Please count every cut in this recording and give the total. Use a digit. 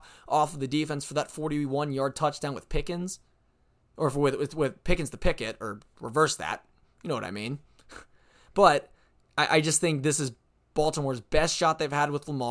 0